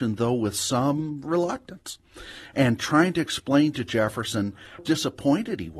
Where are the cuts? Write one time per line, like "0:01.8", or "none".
0:04.8